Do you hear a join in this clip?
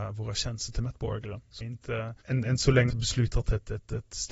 yes; 3 cuts; at 1.6 s, 2.2 s, 2.9 s

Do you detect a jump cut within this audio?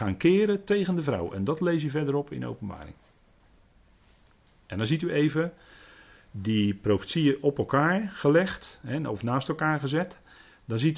no; 0 cuts

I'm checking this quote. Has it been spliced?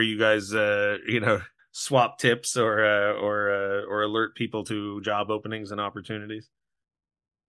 yes; 1 cut; at 1.6 s

